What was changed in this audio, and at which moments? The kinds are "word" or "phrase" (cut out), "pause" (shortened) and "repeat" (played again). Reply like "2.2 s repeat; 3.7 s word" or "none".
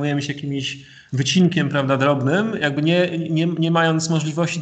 none